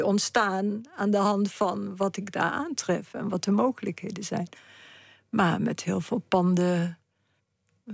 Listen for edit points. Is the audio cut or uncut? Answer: uncut